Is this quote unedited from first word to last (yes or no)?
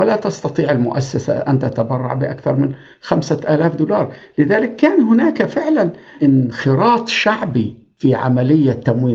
yes